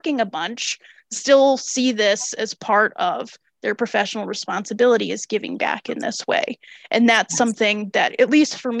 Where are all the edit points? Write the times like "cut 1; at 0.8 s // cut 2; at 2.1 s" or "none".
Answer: none